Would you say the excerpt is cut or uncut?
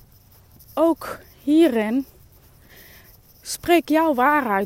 uncut